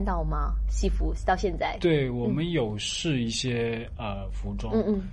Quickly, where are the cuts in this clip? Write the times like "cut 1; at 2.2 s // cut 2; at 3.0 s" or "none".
none